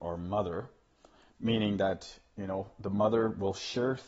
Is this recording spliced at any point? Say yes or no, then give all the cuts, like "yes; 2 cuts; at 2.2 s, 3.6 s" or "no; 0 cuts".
no; 0 cuts